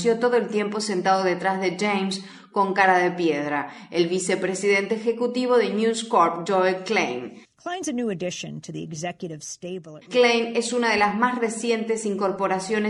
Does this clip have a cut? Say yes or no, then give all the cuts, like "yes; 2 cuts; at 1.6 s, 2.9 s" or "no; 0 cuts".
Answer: no; 0 cuts